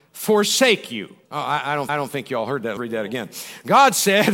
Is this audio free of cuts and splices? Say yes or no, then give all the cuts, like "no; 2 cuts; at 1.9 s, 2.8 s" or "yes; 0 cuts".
no; 3 cuts; at 1.2 s, 1.9 s, 2.8 s